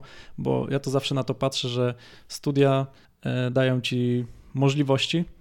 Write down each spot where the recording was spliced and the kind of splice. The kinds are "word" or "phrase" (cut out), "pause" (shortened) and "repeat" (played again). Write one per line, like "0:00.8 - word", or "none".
none